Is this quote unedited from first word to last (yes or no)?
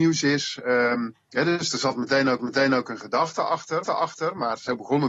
no